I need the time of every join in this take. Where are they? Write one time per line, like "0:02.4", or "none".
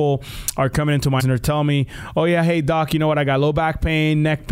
0:01.2